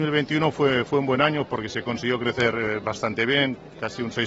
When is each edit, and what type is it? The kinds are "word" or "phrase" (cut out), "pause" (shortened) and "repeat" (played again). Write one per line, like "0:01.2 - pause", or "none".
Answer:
none

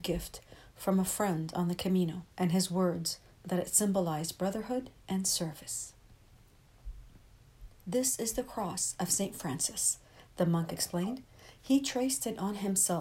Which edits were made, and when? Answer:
0:02.3 - pause

